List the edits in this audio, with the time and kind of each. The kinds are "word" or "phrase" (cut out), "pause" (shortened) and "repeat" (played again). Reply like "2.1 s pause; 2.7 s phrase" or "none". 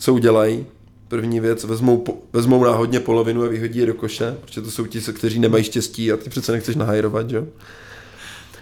none